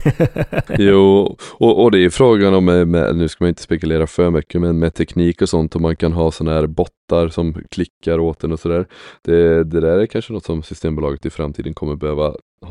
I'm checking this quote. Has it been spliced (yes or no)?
no